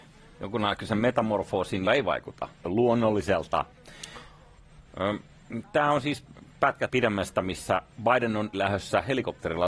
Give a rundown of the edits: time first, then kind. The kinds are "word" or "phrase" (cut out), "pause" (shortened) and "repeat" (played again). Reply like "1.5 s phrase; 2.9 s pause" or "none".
1.9 s word; 2.5 s pause; 6.9 s word; 7.9 s pause; 8.5 s word